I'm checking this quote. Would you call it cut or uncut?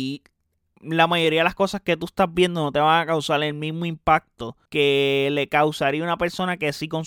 cut